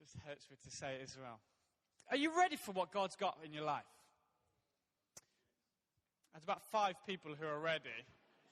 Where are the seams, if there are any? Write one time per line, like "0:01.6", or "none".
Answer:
none